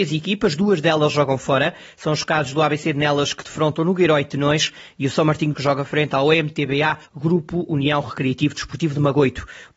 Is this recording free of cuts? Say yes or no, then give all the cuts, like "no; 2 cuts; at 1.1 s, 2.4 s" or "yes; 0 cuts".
no; 2 cuts; at 5.5 s, 7.0 s